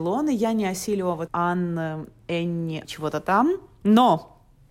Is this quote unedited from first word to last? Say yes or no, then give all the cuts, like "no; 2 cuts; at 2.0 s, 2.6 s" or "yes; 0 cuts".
no; 2 cuts; at 1.3 s, 2.8 s